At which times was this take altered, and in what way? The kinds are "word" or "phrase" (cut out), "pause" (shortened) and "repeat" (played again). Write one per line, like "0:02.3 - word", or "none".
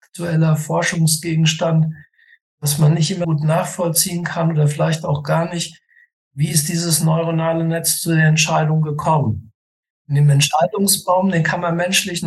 0:03.2 - word